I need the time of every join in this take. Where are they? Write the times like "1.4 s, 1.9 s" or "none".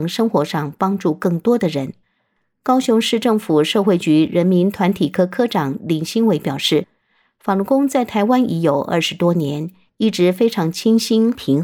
none